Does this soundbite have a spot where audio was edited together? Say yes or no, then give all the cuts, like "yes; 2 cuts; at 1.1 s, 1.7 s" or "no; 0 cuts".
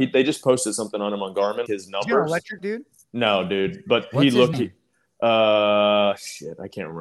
yes; 3 cuts; at 1.7 s, 2.6 s, 4.5 s